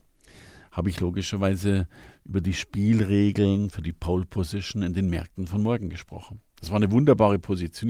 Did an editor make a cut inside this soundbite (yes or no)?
no